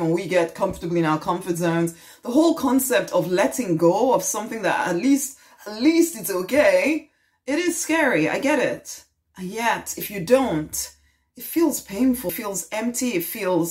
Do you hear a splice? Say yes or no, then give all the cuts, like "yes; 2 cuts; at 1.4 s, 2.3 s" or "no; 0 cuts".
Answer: yes; 1 cut; at 12.3 s